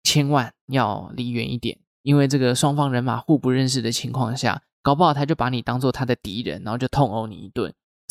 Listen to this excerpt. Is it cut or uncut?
cut